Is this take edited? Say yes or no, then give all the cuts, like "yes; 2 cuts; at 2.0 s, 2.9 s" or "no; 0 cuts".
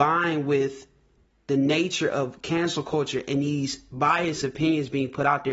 no; 0 cuts